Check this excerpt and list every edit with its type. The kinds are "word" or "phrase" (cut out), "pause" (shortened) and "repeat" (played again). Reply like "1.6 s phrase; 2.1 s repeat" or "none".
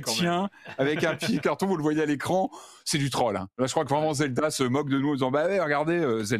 1.4 s word